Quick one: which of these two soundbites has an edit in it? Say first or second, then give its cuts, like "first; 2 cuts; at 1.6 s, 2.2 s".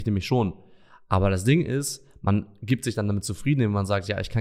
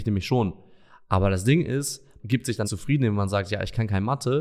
second; 2 cuts; at 2.2 s, 2.6 s